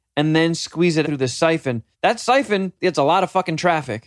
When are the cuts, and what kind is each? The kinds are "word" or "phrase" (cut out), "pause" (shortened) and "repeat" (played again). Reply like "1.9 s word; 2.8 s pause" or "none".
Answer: 1.0 s word; 1.9 s pause; 2.8 s pause